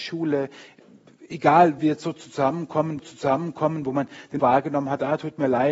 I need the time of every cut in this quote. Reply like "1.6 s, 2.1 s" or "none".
1.8 s, 3.0 s, 4.4 s